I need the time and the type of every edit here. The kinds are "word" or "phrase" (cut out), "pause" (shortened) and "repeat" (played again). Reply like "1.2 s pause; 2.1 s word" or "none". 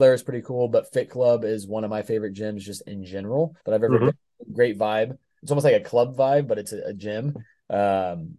3.6 s pause